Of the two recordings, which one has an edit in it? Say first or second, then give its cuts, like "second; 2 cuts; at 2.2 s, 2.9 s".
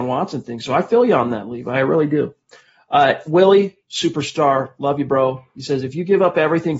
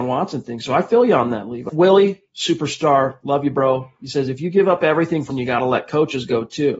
second; 2 cuts; at 1.7 s, 5.3 s